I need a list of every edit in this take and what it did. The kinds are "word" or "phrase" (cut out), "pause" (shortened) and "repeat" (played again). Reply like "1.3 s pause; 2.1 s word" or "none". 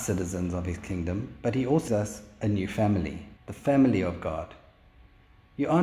1.9 s word; 3.4 s pause